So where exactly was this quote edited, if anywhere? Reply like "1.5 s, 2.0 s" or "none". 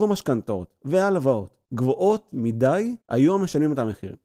3.0 s